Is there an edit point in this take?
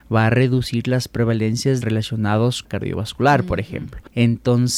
yes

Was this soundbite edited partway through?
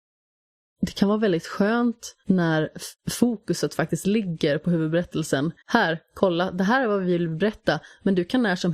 yes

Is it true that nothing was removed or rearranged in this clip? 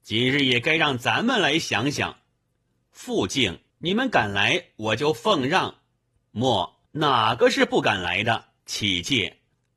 no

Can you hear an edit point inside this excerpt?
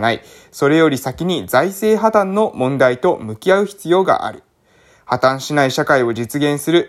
no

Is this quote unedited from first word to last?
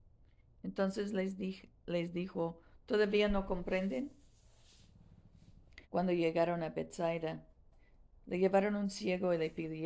no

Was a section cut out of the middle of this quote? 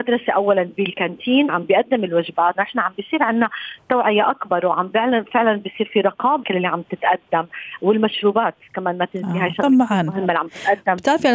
yes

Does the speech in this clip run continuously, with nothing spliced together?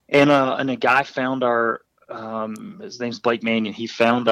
yes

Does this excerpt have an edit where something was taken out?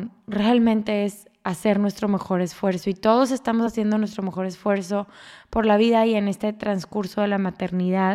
no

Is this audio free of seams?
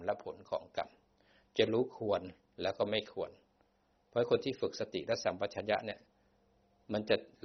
yes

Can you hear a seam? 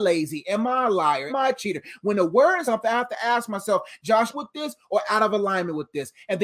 yes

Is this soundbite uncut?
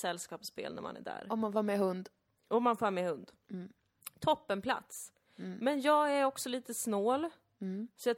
yes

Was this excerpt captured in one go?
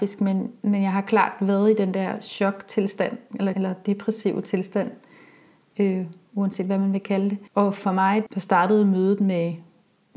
no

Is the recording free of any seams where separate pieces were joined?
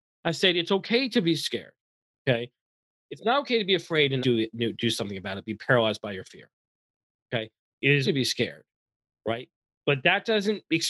no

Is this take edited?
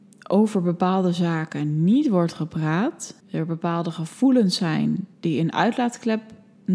yes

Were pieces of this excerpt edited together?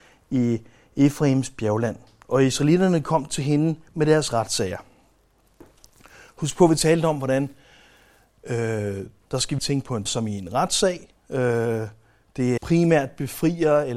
yes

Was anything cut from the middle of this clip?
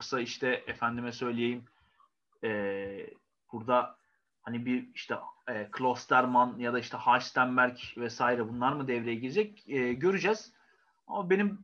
no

